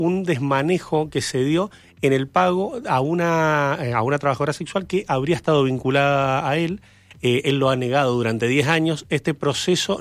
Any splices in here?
no; 0 cuts

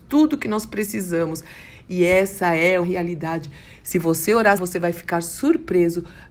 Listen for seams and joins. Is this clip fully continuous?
no; 2 cuts; at 2.8 s, 4.6 s

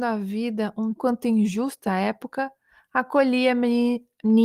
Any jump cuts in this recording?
yes; 2 cuts; at 1.0 s, 1.9 s

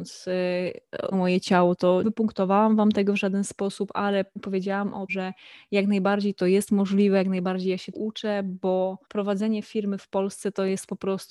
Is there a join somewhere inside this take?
yes; 6 cuts; at 1.1 s, 2.0 s, 4.4 s, 5.1 s, 7.9 s, 9.0 s

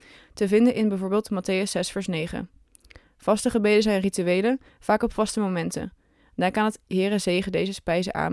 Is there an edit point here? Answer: no; 0 cuts

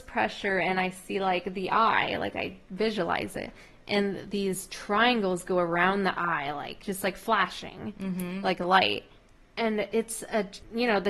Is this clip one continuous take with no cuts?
yes; 0 cuts

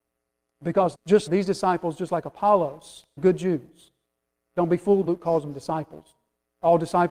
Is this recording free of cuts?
no; 4 cuts; at 0.9 s, 1.3 s, 3.2 s, 5.1 s

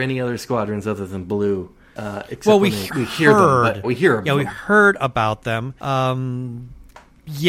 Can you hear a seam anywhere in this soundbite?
yes; 3 cuts; at 2.9 s, 3.8 s, 5.8 s

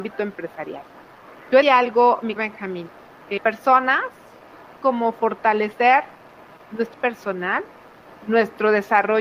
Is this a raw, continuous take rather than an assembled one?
no; 6 cuts; at 1.6 s, 2.4 s, 3.4 s, 4.8 s, 6.6 s, 6.9 s

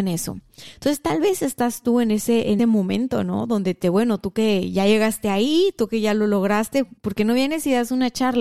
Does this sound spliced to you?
yes; 3 cuts; at 2.6 s, 3.8 s, 7.0 s

